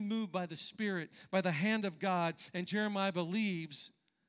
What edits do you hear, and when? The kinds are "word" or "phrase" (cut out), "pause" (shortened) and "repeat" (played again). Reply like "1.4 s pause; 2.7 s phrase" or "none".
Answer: none